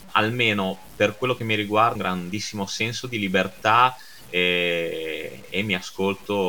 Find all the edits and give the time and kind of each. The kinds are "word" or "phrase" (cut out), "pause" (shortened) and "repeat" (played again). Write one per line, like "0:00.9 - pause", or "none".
0:02.0 - phrase

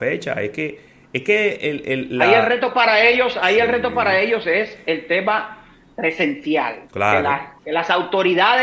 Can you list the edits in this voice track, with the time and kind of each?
0:06.9 - pause
0:07.6 - pause

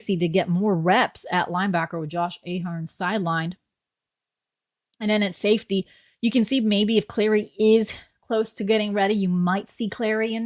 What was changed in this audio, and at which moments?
none

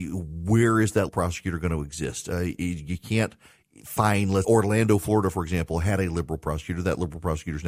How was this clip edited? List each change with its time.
0:01.1 - word
0:04.4 - word

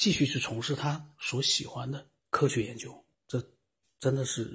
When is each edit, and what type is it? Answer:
0:02.2 - pause
0:03.1 - pause

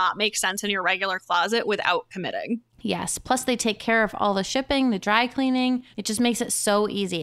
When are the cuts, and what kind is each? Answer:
0:02.7 - pause
0:05.9 - pause

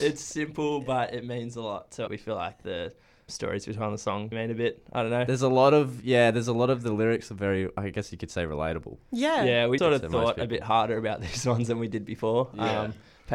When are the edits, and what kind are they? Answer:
0:02.1 - phrase
0:03.3 - word
0:04.3 - word
0:09.8 - word

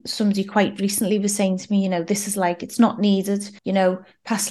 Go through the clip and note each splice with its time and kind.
0:03.6 - pause

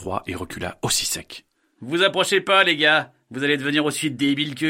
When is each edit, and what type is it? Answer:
none

